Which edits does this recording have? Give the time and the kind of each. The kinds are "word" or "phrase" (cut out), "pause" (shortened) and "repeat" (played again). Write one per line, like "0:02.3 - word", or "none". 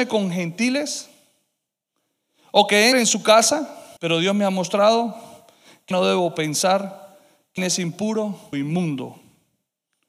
0:02.9 - word
0:04.0 - pause
0:05.9 - word
0:07.6 - word
0:08.5 - word